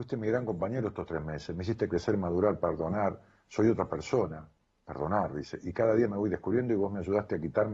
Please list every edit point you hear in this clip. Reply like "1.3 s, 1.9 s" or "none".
none

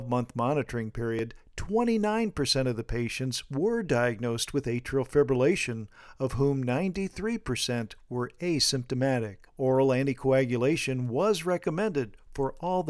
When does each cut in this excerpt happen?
9.5 s

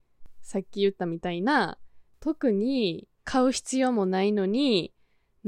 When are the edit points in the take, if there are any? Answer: 3.2 s

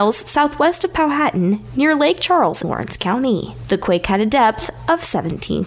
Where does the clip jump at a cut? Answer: 2.6 s

